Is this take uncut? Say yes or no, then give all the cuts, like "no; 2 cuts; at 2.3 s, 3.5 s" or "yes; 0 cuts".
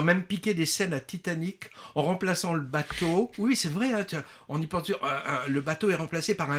yes; 0 cuts